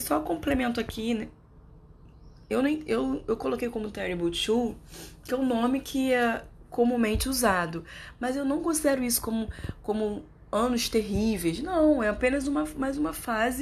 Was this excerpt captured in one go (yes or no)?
yes